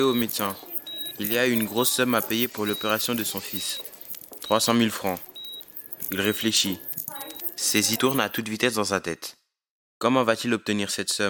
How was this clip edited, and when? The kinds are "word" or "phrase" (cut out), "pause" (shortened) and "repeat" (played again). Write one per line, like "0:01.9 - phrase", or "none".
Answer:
0:07.9 - word